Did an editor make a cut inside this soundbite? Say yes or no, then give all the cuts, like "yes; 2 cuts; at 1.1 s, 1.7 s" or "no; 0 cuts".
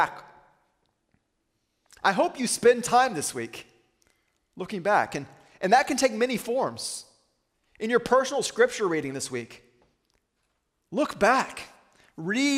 no; 0 cuts